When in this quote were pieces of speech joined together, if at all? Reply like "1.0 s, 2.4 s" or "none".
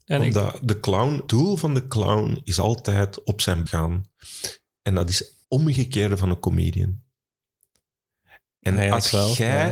1.3 s, 3.7 s, 5.4 s